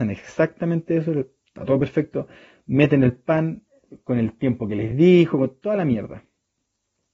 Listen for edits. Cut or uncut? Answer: uncut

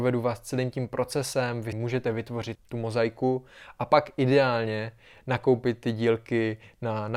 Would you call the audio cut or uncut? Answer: cut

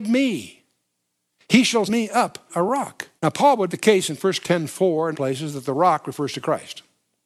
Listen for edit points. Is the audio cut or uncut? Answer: cut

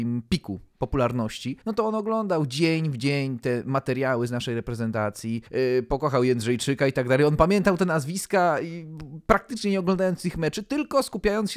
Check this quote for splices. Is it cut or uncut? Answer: cut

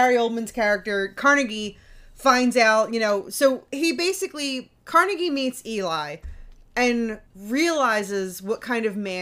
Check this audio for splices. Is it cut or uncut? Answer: cut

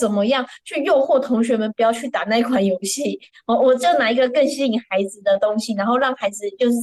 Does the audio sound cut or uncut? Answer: uncut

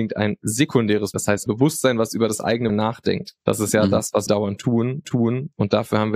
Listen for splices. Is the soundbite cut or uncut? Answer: cut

